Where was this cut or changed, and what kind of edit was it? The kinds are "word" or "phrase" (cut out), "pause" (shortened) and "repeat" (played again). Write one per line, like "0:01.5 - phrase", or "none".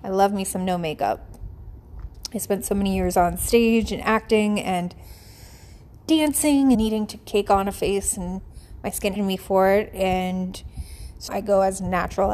0:06.7 - word
0:09.2 - word
0:11.3 - word